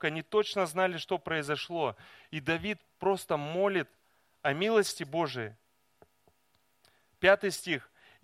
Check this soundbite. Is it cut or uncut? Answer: uncut